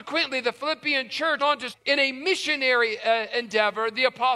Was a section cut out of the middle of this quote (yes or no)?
yes